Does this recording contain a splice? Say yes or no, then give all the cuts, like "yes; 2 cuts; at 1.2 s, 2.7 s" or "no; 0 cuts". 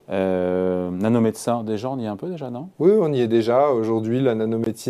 no; 0 cuts